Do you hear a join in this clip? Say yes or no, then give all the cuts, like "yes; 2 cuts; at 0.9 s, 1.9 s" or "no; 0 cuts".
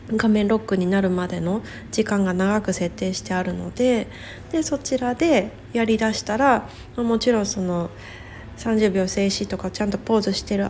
no; 0 cuts